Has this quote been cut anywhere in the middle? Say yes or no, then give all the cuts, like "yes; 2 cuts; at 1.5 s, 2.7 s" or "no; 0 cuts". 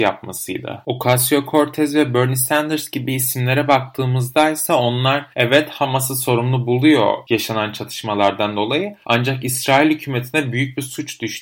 yes; 2 cuts; at 5.3 s, 9.0 s